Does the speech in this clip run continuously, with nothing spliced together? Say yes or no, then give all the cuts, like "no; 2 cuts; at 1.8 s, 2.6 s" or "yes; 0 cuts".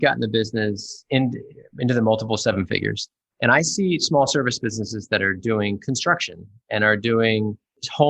yes; 0 cuts